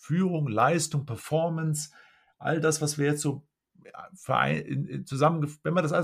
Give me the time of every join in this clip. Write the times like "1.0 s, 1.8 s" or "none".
3.6 s